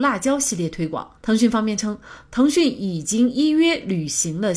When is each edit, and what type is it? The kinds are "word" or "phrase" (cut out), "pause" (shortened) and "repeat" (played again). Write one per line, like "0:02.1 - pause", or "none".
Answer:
0:01.2 - pause